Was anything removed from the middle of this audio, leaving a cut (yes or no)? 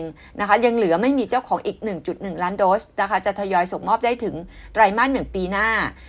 no